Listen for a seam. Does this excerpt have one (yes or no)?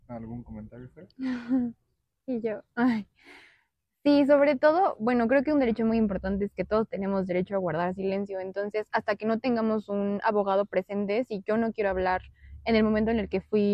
no